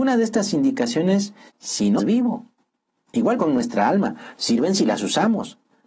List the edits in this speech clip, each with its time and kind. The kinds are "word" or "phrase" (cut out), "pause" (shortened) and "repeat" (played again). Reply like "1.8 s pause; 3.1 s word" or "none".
1.5 s word; 2.0 s word; 3.4 s word